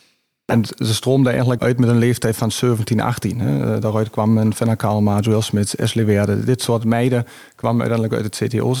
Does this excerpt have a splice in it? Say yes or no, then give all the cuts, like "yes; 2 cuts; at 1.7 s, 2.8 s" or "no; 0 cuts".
yes; 1 cut; at 1.6 s